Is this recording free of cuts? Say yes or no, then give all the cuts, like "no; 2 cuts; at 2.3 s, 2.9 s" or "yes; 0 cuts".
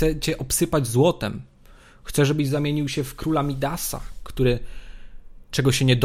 yes; 0 cuts